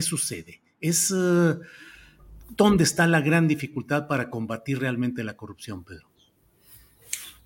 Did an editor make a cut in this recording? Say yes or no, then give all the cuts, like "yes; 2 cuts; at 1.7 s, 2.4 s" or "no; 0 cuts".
no; 0 cuts